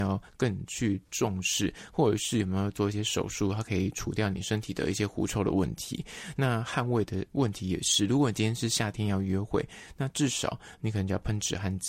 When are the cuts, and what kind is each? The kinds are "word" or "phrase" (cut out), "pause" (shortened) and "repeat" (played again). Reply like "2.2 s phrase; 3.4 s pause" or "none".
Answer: 7.3 s pause